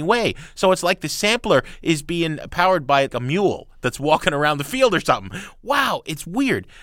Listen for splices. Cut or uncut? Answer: cut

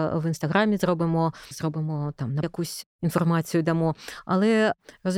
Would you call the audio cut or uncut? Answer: cut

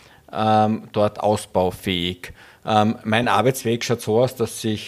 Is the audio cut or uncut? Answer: uncut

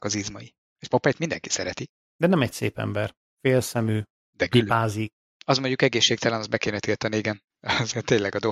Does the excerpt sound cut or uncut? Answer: uncut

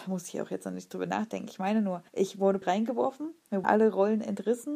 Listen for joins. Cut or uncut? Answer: cut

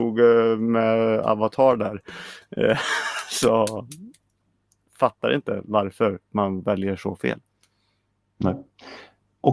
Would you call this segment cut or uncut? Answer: uncut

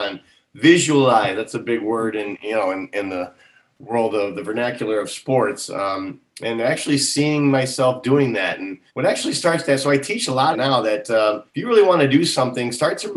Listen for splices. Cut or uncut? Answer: cut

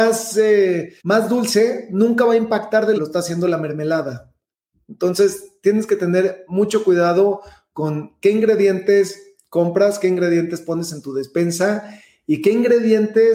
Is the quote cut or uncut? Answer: cut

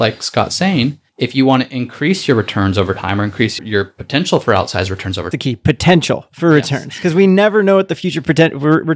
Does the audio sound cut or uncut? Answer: cut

